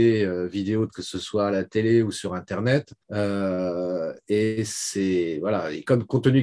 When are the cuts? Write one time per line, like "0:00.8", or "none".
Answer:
0:00.9
0:03.0